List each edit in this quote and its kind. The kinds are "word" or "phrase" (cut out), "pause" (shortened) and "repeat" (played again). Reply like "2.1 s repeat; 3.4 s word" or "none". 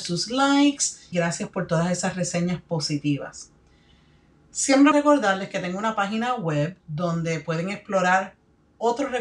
1.1 s word; 4.9 s phrase; 6.8 s pause